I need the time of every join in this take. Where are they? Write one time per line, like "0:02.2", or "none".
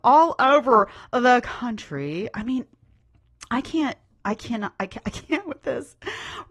none